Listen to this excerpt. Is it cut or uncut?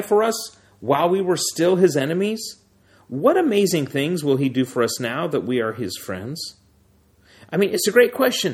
uncut